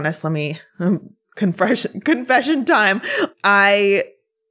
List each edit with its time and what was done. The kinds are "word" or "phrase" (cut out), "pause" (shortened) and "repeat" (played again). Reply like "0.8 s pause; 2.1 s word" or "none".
none